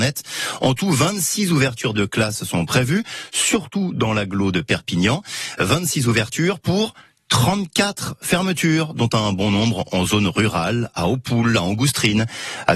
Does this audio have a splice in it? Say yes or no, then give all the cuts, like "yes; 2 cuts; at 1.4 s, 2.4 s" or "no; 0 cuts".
no; 0 cuts